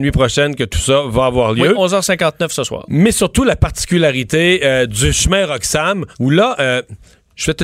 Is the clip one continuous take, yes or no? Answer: no